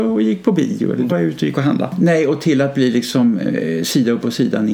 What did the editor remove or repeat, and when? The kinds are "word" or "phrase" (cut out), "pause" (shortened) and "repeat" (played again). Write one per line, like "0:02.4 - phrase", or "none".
0:01.1 - word